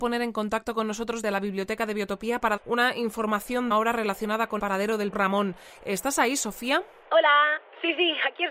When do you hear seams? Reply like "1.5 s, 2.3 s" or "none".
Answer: 1.2 s, 2.6 s, 3.7 s, 4.6 s, 5.1 s